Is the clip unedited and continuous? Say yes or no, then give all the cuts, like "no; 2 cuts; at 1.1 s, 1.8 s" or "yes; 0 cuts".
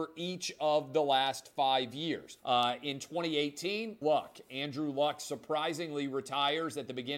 no; 2 cuts; at 2.4 s, 4.0 s